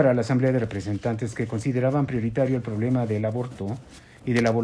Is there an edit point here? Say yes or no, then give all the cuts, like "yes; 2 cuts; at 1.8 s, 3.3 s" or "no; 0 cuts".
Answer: no; 0 cuts